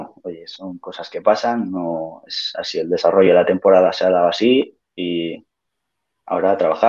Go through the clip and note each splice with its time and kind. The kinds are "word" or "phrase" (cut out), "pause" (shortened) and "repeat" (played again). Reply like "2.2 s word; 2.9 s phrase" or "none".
none